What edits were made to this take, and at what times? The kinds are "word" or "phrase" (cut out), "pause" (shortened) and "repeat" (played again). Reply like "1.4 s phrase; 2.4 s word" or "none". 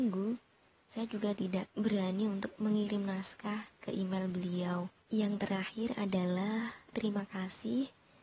1.7 s pause; 5.0 s pause; 6.9 s word